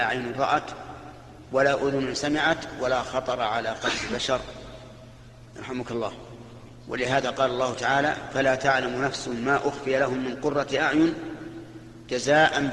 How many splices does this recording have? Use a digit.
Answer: 0